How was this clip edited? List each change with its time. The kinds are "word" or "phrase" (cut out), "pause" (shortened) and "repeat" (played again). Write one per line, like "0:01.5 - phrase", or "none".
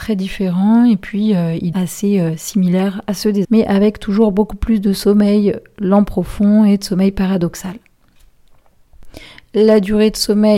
0:01.7 - word
0:03.4 - word